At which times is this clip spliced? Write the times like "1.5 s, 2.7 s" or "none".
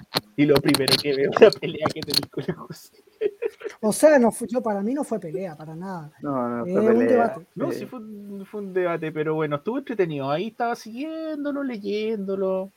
7.5 s

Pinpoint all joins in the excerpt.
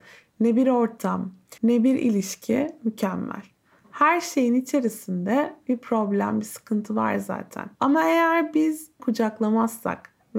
1.6 s, 7.7 s, 9.0 s

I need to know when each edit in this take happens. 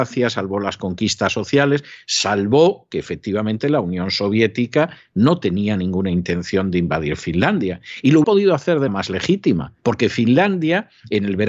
8.2 s, 8.9 s, 9.8 s

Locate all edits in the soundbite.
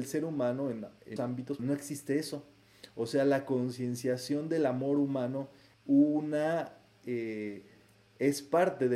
1.2 s, 1.6 s, 5.7 s

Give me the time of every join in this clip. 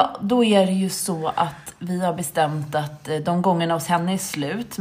none

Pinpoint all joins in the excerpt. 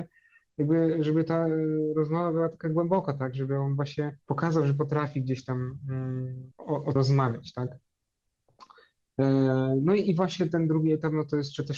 4.2 s, 6.5 s, 7.0 s

